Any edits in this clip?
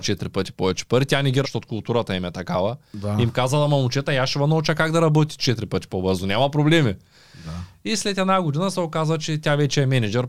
yes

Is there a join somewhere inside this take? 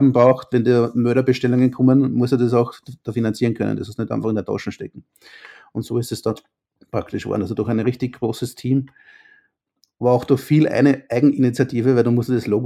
no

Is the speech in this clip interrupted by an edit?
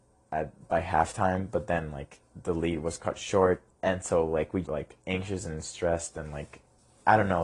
yes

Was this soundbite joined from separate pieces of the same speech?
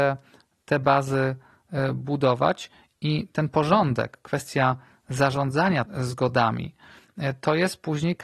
yes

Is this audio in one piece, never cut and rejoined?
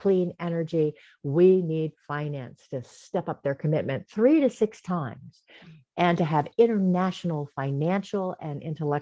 yes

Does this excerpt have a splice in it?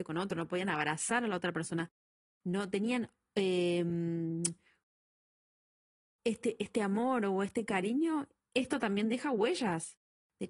no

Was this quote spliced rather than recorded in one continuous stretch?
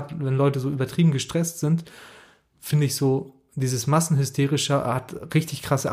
no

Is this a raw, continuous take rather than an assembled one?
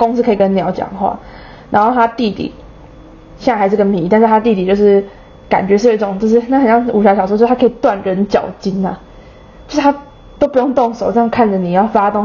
yes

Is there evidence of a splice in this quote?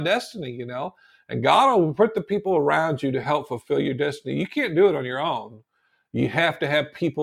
no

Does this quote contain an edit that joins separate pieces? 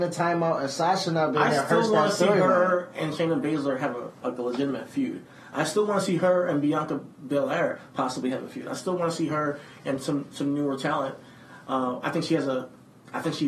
yes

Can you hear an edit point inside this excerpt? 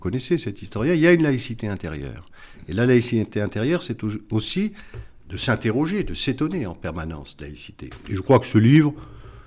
yes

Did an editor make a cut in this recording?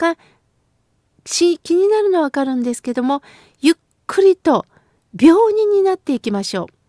no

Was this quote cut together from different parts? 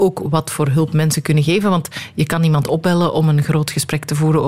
no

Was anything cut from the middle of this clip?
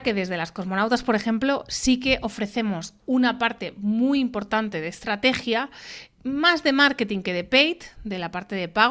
no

